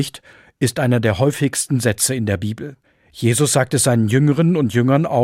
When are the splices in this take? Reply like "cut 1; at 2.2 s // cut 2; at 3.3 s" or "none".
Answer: cut 1; at 2.8 s